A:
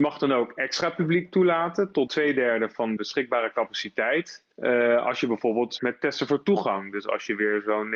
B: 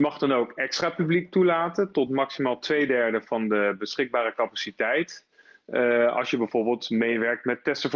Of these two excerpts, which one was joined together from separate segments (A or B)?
A